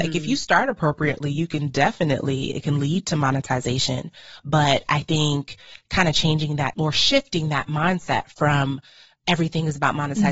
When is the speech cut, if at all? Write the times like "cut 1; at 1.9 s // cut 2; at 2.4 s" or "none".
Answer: none

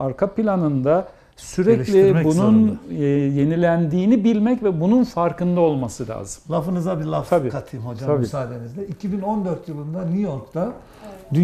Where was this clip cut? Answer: none

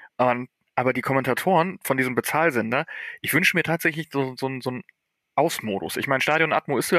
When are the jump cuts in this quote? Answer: none

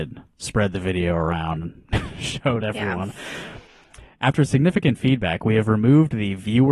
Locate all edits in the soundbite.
none

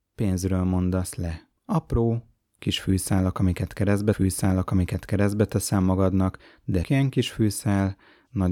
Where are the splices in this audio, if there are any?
cut 1; at 1.6 s // cut 2; at 4.1 s // cut 3; at 6.8 s

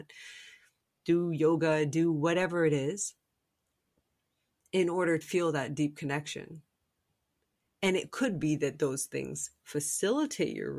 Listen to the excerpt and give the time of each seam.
cut 1; at 5.2 s

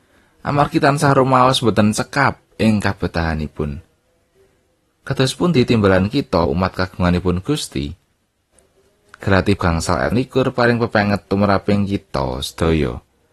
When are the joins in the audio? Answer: cut 1; at 6.5 s // cut 2; at 9.6 s // cut 3; at 10.1 s

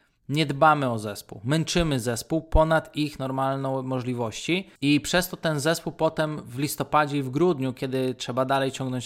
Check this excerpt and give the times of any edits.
cut 1; at 4.8 s

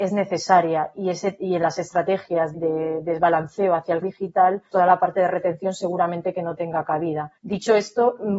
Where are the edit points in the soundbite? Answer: cut 1; at 2.5 s // cut 2; at 4.0 s // cut 3; at 4.7 s // cut 4; at 7.4 s

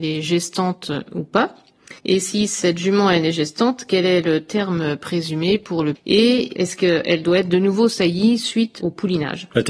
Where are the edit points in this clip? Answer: cut 1; at 2.0 s // cut 2; at 6.0 s

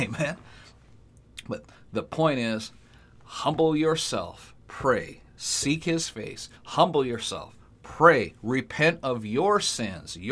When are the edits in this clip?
cut 1; at 6.6 s

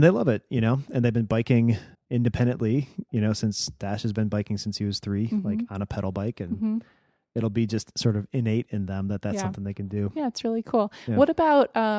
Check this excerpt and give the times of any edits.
cut 1; at 1.9 s

